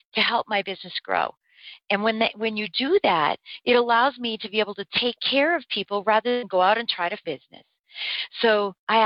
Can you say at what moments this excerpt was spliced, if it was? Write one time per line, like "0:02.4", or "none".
0:07.2